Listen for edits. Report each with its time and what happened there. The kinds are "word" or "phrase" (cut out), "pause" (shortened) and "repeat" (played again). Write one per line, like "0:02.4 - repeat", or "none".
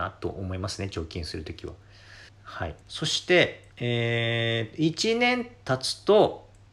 0:02.3 - pause
0:02.8 - pause
0:03.7 - pause